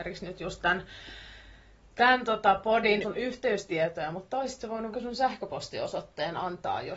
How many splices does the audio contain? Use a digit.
2